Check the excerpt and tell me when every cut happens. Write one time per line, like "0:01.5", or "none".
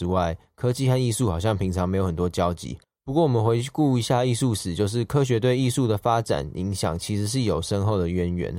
0:02.8